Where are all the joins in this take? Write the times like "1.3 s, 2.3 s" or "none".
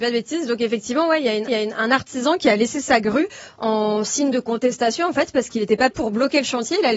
1.5 s, 5.9 s